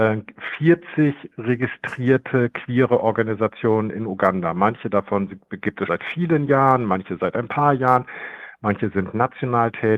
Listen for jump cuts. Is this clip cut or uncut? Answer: cut